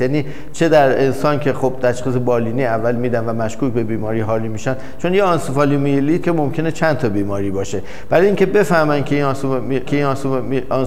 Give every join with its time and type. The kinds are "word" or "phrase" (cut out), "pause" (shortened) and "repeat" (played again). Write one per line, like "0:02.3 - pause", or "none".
0:06.2 - word
0:09.9 - repeat